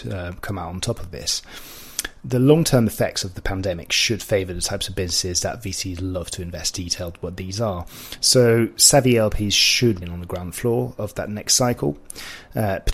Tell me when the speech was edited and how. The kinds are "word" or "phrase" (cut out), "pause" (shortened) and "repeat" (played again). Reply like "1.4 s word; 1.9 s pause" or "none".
6.7 s phrase; 10.0 s phrase